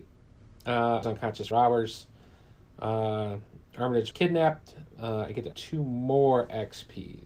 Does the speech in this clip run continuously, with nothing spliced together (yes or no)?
no